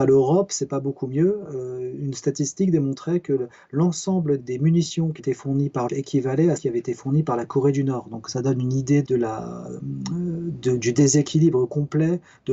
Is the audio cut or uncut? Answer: cut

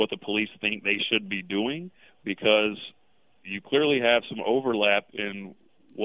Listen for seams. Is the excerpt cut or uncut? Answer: uncut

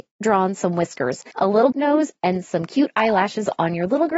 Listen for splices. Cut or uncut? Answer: cut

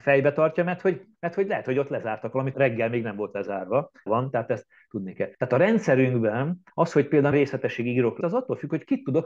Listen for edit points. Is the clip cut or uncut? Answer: cut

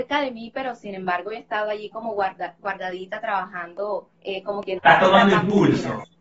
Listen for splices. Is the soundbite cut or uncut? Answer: cut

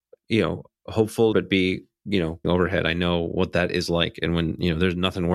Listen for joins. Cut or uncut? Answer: cut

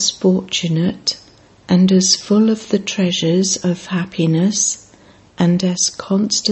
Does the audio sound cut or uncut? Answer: uncut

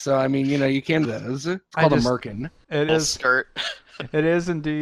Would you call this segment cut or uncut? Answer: cut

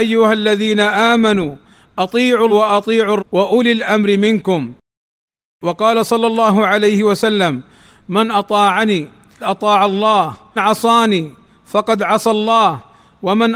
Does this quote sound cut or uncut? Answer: cut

